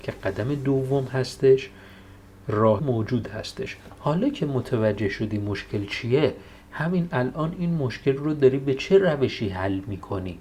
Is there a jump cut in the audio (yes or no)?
yes